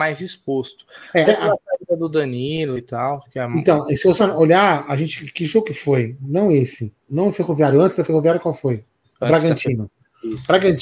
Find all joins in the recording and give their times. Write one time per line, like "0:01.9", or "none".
0:01.3
0:04.2
0:07.0
0:09.0